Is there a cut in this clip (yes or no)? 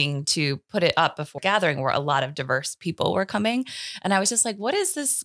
yes